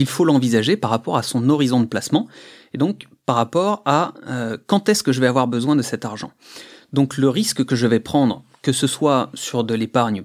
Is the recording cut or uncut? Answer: uncut